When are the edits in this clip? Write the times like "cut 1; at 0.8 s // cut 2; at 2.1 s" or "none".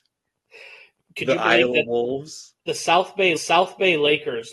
cut 1; at 2.6 s // cut 2; at 3.4 s